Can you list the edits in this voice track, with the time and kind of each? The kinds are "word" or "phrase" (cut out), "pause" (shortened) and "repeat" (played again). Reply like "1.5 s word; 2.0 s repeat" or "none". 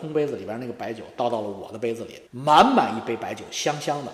2.3 s pause